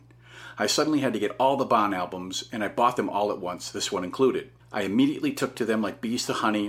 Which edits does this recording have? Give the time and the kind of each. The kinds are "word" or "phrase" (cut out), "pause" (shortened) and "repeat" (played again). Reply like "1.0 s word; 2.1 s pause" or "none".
4.6 s pause

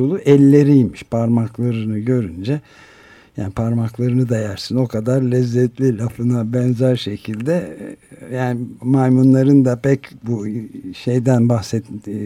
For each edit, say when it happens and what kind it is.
none

